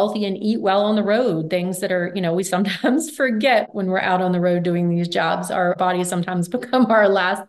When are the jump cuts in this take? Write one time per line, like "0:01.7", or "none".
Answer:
none